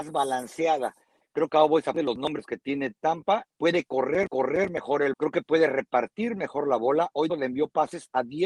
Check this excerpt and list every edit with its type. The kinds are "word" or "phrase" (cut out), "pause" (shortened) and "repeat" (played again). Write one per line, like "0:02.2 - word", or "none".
0:01.5 - word
0:01.9 - word
0:03.5 - pause
0:04.3 - repeat
0:05.1 - word
0:07.3 - word